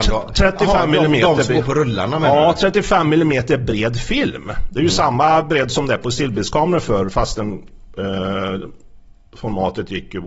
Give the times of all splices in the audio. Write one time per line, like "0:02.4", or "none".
none